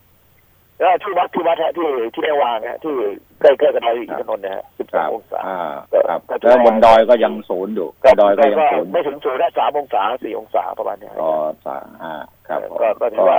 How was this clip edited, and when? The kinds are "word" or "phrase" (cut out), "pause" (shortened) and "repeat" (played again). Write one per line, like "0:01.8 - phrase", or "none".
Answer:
0:04.7 - pause
0:05.8 - pause
0:07.9 - pause